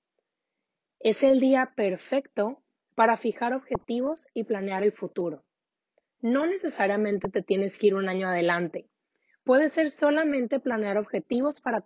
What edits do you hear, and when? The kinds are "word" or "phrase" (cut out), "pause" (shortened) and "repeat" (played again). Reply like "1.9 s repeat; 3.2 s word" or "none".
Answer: none

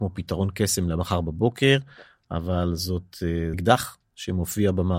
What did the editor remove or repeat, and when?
3.5 s word

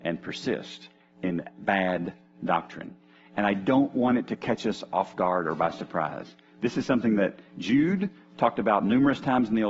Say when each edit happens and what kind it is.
none

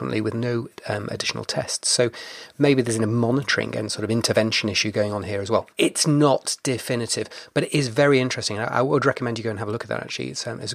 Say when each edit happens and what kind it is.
5.7 s pause

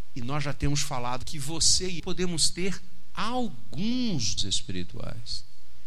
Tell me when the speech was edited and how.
1.2 s word; 2.0 s word; 4.4 s word

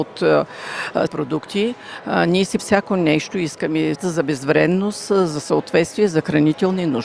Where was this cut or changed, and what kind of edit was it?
1.1 s word; 2.6 s word; 3.9 s word

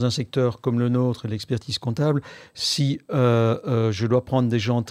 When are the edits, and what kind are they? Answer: none

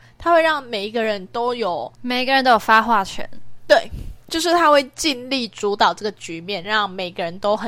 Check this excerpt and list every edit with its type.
1.9 s pause; 4.2 s pause

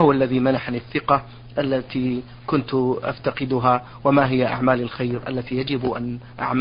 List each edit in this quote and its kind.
none

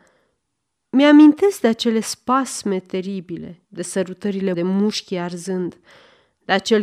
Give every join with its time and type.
3.6 s pause; 4.5 s word

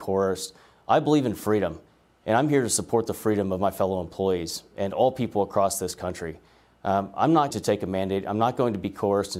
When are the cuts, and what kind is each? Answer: 7.5 s word

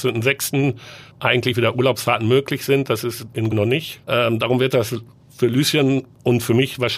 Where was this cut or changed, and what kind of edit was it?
1.1 s pause; 3.5 s word; 4.0 s pause

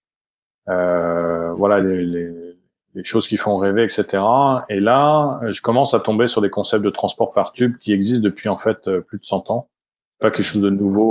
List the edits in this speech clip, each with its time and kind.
none

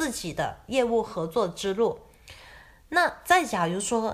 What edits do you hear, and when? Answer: none

